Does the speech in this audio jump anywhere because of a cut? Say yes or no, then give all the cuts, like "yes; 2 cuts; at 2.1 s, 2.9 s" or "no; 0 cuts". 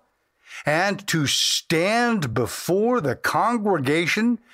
no; 0 cuts